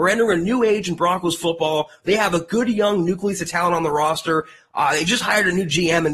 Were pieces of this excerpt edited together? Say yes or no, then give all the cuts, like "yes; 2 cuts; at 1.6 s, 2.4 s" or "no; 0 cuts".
no; 0 cuts